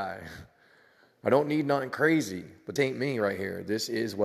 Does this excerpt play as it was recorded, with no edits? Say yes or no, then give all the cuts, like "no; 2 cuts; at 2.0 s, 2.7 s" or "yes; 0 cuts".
no; 1 cut; at 2.8 s